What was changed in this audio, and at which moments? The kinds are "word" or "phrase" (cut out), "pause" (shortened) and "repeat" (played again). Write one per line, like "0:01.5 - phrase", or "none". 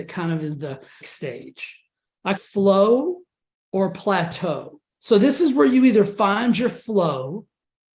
0:01.0 - phrase
0:02.4 - phrase
0:04.9 - pause